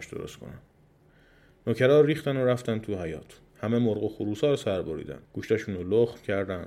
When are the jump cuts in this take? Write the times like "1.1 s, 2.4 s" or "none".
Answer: 3.5 s, 5.2 s